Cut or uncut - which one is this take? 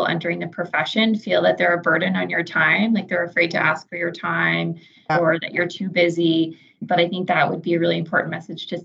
uncut